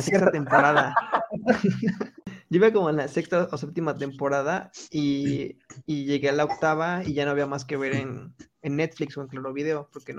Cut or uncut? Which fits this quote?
uncut